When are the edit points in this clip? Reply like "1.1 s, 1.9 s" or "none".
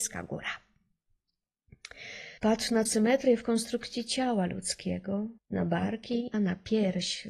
2.4 s, 2.9 s, 5.4 s, 6.3 s